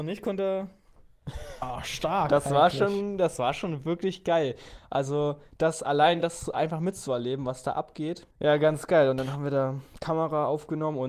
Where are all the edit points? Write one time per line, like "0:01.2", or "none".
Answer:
0:08.3